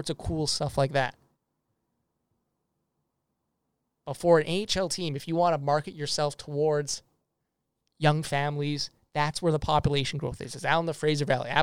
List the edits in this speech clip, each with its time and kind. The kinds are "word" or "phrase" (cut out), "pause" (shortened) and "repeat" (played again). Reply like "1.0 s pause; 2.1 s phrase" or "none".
none